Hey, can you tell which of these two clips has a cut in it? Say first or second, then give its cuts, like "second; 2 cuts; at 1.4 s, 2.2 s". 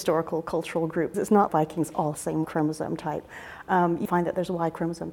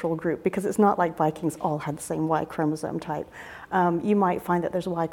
first; 5 cuts; at 1.1 s, 1.5 s, 2.1 s, 2.4 s, 4.1 s